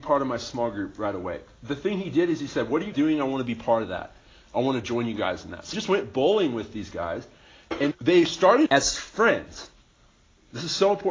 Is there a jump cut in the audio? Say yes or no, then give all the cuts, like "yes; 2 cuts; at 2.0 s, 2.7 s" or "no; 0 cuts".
yes; 4 cuts; at 2.9 s, 5.7 s, 7.9 s, 8.7 s